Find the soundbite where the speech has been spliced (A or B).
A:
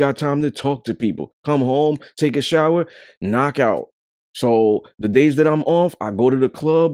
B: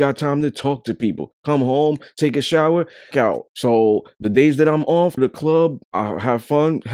B